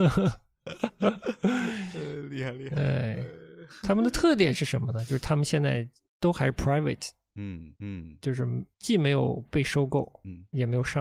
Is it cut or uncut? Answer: cut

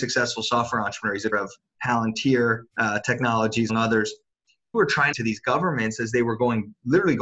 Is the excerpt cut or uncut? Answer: cut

